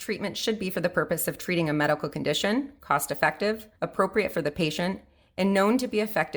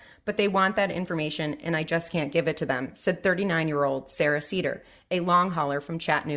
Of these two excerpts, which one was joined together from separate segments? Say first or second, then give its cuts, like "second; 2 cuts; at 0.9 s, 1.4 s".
first; 1 cut; at 3.8 s